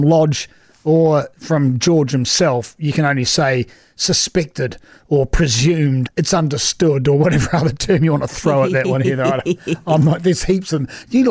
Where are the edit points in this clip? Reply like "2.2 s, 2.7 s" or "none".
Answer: 6.1 s